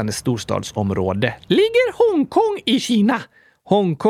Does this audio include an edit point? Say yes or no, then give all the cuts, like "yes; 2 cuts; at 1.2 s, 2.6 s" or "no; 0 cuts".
no; 0 cuts